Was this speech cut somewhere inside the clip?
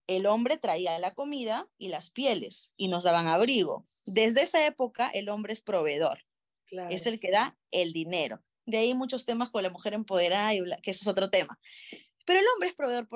no; 0 cuts

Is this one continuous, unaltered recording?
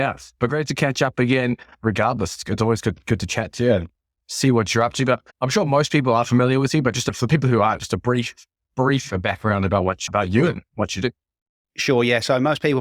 no; 1 cut; at 5.3 s

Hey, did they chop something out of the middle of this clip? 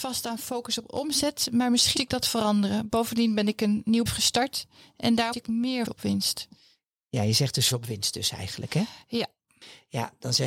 yes; 5 cuts; at 2.0 s, 4.1 s, 5.3 s, 5.9 s, 7.7 s

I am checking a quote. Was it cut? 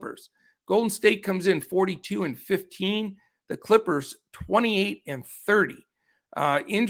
no; 0 cuts

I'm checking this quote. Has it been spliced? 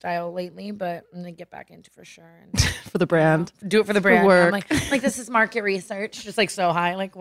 yes; 2 cuts; at 1.9 s, 3.6 s

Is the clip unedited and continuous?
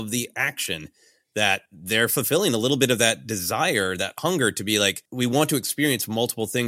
no; 2 cuts; at 1.7 s, 5.1 s

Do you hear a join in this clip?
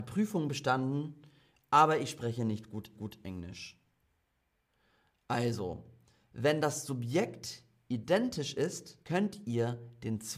yes; 2 cuts; at 2.9 s, 9.0 s

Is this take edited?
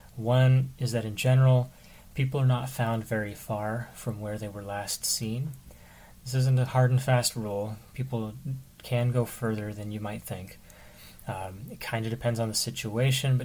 no; 0 cuts

